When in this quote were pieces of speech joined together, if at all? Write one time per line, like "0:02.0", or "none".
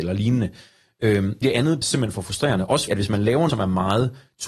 0:01.4
0:01.8
0:02.9
0:03.5

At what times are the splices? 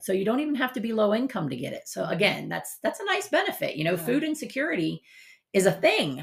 none

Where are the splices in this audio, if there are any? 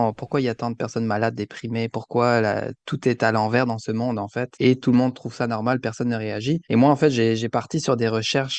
0:04.5
0:06.6

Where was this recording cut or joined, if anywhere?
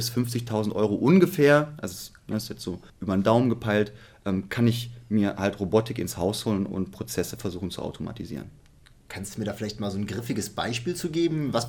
0:02.9

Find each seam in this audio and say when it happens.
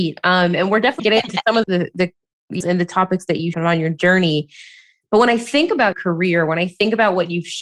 0:01.0
0:01.6
0:02.6
0:03.5
0:05.9

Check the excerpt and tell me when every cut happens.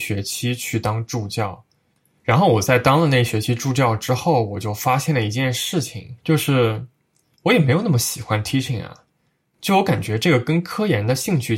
none

